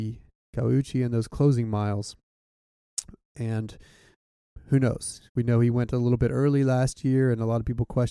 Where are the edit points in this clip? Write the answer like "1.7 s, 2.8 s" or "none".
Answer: 5.3 s